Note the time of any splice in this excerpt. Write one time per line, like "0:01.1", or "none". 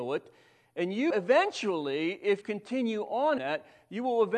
0:01.1
0:02.4
0:03.4